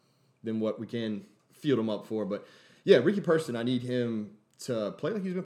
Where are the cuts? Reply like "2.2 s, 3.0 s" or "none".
none